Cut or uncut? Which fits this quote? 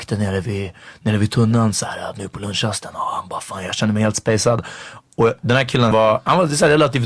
cut